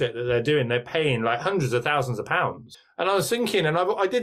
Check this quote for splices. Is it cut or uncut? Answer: uncut